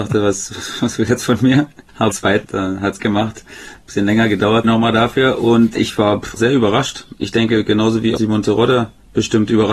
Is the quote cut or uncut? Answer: cut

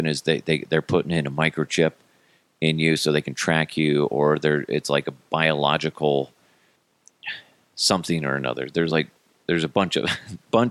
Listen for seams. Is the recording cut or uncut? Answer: uncut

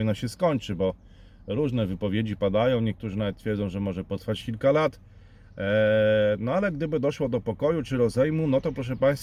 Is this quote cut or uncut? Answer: uncut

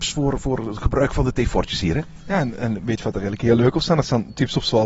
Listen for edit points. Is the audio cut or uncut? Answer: uncut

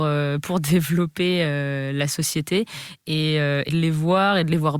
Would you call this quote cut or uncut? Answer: cut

